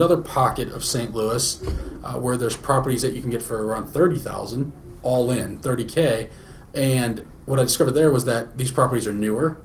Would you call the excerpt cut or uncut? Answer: uncut